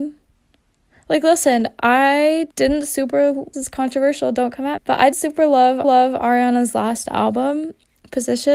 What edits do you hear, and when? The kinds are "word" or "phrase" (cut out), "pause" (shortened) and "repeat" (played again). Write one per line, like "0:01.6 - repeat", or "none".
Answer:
0:02.5 - pause
0:03.5 - word
0:04.8 - word
0:05.1 - word
0:05.8 - repeat